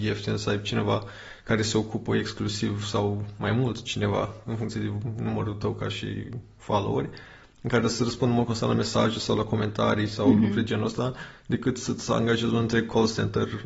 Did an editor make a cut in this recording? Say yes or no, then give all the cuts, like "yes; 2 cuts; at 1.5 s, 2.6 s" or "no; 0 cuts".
no; 0 cuts